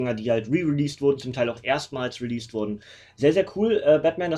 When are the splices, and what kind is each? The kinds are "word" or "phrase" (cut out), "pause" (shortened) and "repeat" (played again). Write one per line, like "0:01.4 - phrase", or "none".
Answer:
none